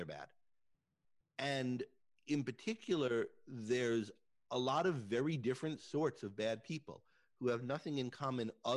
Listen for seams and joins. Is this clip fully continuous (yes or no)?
yes